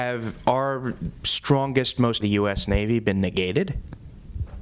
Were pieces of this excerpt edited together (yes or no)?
yes